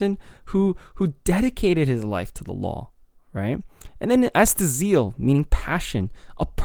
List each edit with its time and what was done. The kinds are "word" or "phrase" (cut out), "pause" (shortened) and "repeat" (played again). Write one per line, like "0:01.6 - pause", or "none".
none